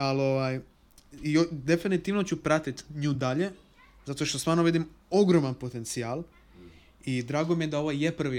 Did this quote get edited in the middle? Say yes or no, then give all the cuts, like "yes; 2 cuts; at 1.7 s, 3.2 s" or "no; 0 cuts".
no; 0 cuts